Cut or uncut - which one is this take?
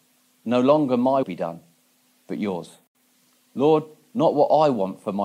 cut